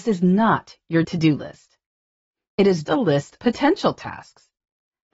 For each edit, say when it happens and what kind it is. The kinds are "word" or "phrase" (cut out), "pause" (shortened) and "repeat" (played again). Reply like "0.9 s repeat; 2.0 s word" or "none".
1.0 s word; 2.8 s word; 3.4 s word